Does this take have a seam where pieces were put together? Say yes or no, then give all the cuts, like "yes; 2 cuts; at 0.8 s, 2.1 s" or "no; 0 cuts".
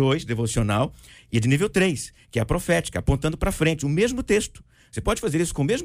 no; 0 cuts